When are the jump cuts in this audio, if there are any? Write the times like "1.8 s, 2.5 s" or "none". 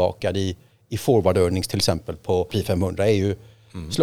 2.5 s

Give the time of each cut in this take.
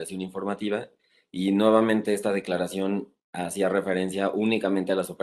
none

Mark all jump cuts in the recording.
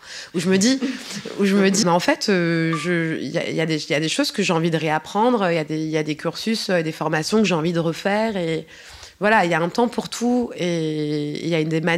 1.8 s

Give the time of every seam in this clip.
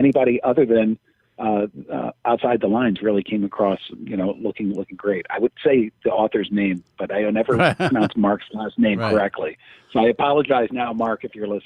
none

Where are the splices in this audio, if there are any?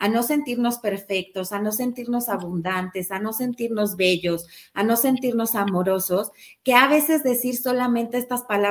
none

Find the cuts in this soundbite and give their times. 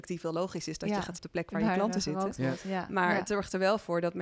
1.2 s

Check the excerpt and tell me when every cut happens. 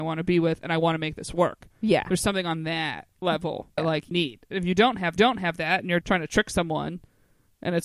3.8 s, 4.1 s, 5.2 s, 6.0 s

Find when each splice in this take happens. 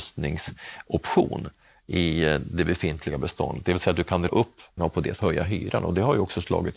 4.3 s, 4.8 s, 5.2 s

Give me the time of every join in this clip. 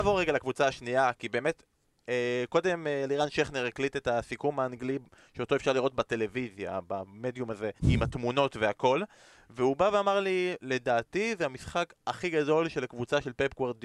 7.8 s

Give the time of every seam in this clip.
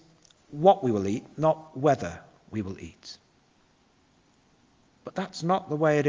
none

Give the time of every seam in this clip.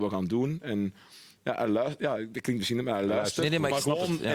none

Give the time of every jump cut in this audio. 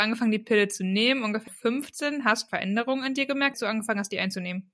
1.5 s, 2.5 s, 3.5 s

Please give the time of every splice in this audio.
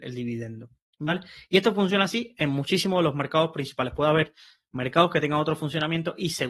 none

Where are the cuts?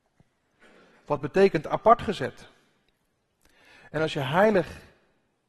none

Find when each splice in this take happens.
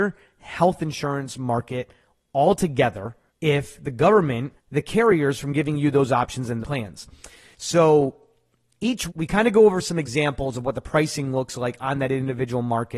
3.3 s, 4.6 s, 6.6 s, 9.1 s

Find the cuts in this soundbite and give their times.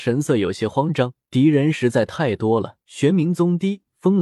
1.2 s, 2.8 s

